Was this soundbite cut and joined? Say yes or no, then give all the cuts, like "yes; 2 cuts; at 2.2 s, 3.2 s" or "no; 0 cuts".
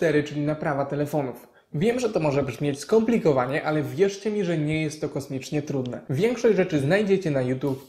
no; 0 cuts